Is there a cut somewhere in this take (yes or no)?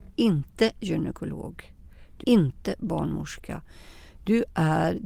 yes